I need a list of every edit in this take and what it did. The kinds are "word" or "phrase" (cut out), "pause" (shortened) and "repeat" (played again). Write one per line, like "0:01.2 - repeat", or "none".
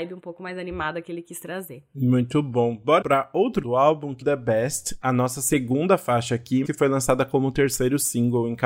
0:03.0 - word
0:03.6 - word
0:04.2 - phrase
0:06.6 - word